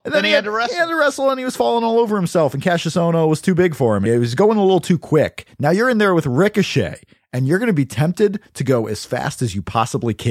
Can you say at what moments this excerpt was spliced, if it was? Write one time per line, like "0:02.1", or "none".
0:04.1